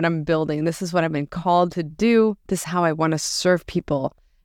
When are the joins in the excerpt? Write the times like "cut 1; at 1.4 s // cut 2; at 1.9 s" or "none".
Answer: cut 1; at 2.6 s